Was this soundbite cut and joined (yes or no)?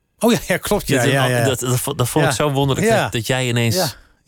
no